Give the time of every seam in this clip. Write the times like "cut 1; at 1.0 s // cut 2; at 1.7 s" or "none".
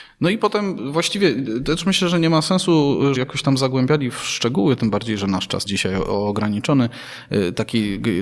cut 1; at 3.2 s // cut 2; at 5.7 s